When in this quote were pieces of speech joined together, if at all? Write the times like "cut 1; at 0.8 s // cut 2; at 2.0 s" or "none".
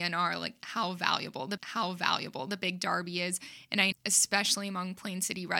cut 1; at 1.6 s // cut 2; at 3.9 s